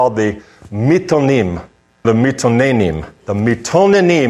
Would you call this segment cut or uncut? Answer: cut